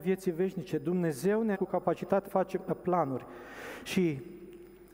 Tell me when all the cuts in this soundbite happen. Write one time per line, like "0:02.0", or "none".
0:01.5
0:02.2